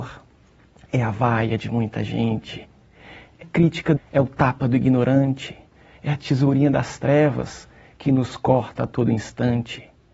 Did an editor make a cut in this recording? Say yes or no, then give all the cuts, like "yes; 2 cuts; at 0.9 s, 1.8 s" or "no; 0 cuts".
yes; 2 cuts; at 3.4 s, 4.0 s